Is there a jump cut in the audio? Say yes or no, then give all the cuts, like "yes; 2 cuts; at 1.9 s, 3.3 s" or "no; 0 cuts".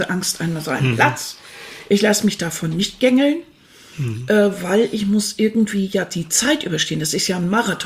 no; 0 cuts